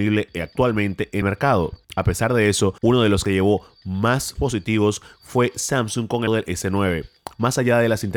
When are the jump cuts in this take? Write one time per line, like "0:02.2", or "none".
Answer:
0:01.2
0:01.8
0:02.8
0:03.3
0:04.4
0:06.3